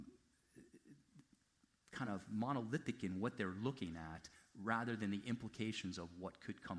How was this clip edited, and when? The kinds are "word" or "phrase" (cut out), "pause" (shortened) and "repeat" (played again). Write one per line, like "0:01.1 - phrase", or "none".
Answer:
none